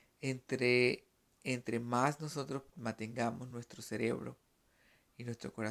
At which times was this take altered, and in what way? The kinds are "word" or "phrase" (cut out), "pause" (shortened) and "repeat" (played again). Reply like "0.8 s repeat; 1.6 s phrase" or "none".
none